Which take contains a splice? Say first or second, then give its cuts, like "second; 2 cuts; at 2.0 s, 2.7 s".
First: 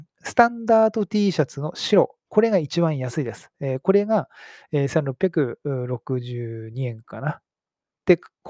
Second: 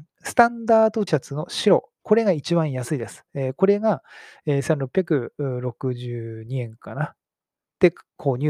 second; 1 cut; at 1.1 s